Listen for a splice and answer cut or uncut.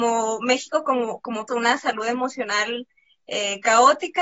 cut